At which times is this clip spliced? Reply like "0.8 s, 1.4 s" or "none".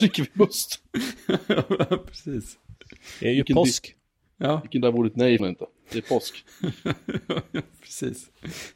4.8 s, 5.4 s